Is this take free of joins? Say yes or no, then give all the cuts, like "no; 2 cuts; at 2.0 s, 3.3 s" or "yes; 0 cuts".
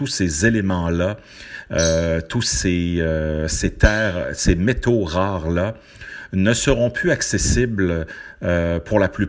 yes; 0 cuts